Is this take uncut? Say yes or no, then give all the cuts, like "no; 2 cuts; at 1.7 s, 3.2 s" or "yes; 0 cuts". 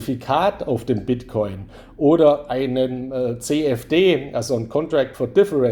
yes; 0 cuts